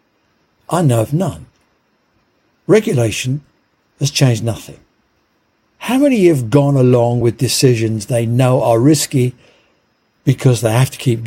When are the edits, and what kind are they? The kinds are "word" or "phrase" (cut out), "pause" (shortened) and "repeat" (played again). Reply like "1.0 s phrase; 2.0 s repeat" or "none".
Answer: none

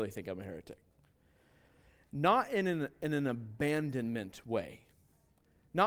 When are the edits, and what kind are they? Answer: none

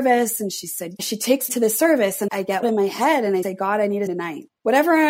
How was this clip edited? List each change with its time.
1.0 s word; 1.5 s word; 2.3 s word; 2.6 s word; 3.4 s word; 4.1 s word

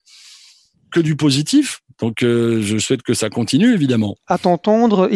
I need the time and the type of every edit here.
none

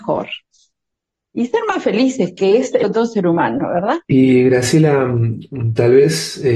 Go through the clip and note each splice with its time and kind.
2.8 s word; 4.0 s pause

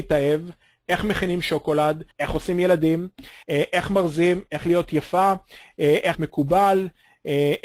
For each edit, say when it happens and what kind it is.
2.1 s pause; 3.4 s pause; 6.1 s word

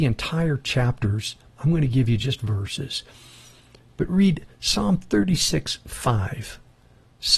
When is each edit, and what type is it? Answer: none

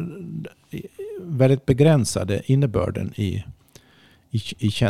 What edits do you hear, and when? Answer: none

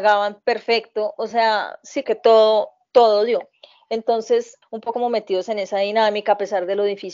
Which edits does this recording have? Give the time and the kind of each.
2.0 s word; 4.6 s word; 4.9 s word

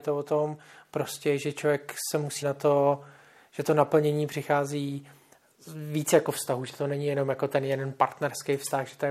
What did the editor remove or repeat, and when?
2.4 s word

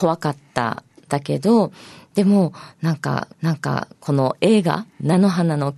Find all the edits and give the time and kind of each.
3.3 s repeat

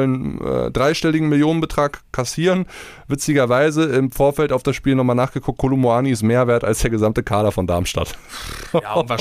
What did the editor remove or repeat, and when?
none

